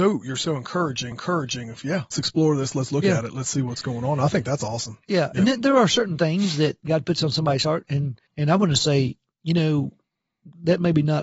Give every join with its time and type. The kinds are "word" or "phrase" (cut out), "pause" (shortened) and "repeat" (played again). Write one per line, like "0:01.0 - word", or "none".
0:01.1 - repeat
0:02.1 - word
0:08.3 - pause